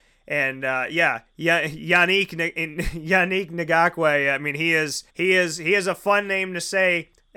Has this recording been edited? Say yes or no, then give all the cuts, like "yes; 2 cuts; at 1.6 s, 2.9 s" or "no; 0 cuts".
yes; 1 cut; at 5.1 s